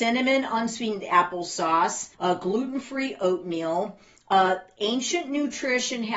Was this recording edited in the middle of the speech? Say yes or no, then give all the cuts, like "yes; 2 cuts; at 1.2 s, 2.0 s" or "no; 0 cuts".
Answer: yes; 1 cut; at 2.1 s